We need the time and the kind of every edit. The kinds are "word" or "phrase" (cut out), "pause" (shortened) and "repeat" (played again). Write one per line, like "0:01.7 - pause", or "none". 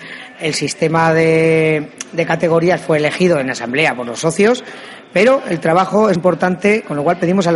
0:06.2 - word